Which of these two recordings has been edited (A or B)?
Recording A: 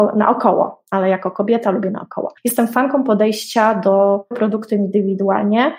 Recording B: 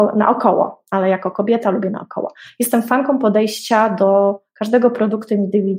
A